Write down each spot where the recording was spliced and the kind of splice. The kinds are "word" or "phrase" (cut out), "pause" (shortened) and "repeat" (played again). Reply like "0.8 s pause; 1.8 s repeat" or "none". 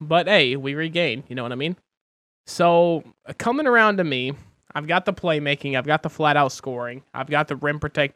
none